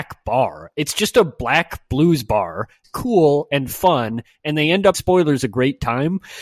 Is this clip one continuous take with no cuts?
no; 2 cuts; at 2.8 s, 4.9 s

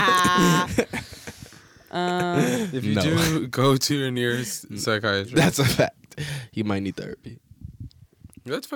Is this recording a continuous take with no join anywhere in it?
yes; 0 cuts

